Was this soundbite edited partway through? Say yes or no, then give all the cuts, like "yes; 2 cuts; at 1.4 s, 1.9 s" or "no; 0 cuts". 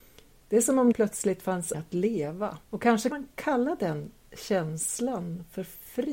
yes; 4 cuts; at 0.9 s, 1.7 s, 2.6 s, 3.1 s